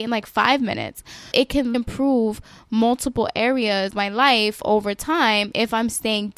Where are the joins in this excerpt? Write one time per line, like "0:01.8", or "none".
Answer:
0:01.3
0:01.7
0:03.9